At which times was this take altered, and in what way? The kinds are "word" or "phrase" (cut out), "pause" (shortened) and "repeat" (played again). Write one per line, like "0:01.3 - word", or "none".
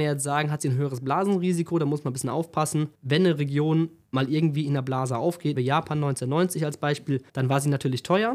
0:02.9 - pause
0:04.0 - pause
0:05.6 - word
0:07.3 - pause